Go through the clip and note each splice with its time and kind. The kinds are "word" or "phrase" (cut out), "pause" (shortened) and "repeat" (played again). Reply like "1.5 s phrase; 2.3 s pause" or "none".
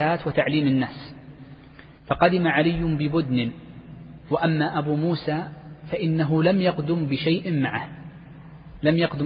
2.0 s pause